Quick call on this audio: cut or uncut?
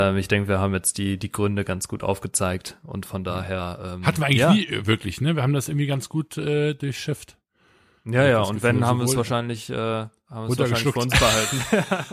uncut